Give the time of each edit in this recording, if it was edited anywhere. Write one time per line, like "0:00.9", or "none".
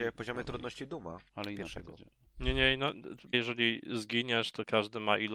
0:01.3
0:02.2
0:03.3